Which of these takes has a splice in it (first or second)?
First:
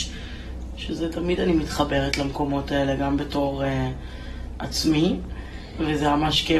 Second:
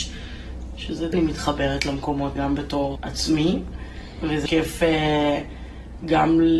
second